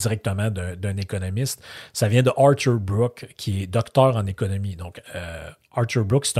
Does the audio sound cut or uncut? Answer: uncut